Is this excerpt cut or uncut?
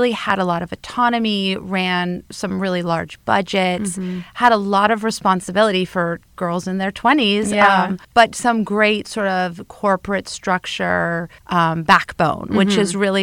cut